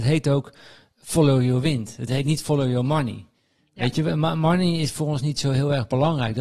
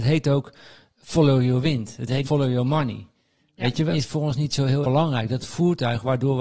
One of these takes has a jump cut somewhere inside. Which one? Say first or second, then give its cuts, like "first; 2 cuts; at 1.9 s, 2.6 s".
second; 4 cuts; at 2.2 s, 3.9 s, 4.8 s, 5.4 s